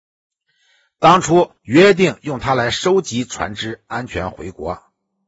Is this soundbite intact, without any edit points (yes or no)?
no